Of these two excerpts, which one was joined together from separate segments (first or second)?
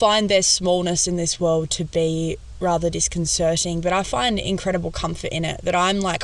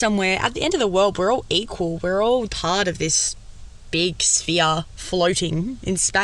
second